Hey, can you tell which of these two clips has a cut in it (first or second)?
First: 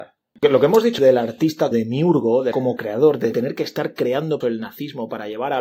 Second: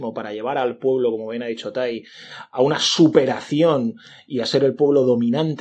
first